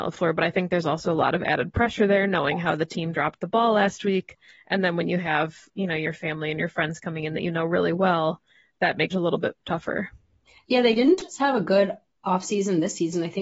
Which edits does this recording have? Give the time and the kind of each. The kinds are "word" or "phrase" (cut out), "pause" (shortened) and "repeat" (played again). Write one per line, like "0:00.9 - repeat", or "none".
0:09.1 - phrase